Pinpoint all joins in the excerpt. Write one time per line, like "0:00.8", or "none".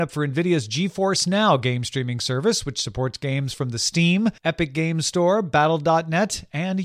0:04.4